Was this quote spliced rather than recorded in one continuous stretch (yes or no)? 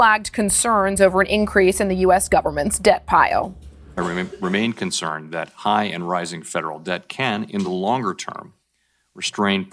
no